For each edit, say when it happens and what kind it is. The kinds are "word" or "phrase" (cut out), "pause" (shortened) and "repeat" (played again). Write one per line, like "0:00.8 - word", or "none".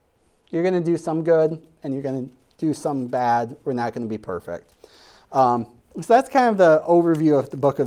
0:05.9 - word